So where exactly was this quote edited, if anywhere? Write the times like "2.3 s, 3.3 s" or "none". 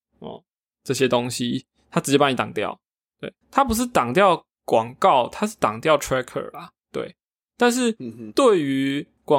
3.4 s, 4.5 s, 6.8 s